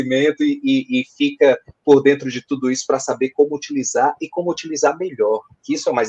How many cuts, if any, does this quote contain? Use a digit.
0